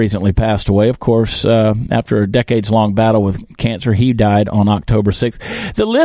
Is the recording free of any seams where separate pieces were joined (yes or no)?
yes